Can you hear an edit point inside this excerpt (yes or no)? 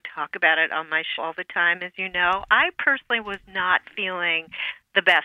yes